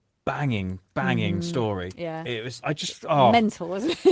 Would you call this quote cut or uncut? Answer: cut